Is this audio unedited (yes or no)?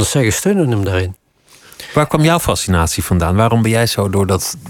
yes